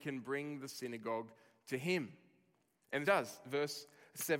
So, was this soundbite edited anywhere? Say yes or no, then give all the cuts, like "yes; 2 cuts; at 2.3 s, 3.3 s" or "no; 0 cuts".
yes; 1 cut; at 3.0 s